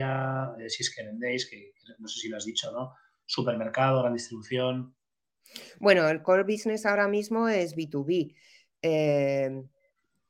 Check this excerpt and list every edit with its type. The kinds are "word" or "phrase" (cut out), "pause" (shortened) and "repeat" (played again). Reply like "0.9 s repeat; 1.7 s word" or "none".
none